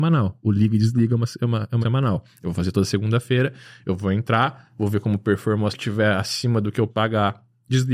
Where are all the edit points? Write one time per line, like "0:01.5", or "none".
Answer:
0:01.8
0:05.7
0:06.9